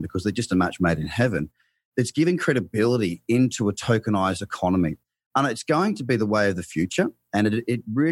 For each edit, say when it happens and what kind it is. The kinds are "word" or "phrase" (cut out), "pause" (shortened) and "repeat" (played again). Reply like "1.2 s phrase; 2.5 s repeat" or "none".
none